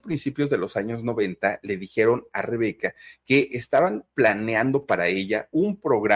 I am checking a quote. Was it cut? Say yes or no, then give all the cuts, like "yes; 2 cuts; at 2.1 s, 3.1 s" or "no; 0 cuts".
no; 0 cuts